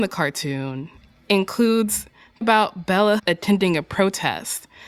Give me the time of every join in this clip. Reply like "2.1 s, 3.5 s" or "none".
2.4 s, 3.2 s